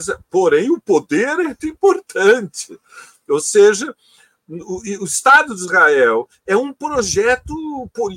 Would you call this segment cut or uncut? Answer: cut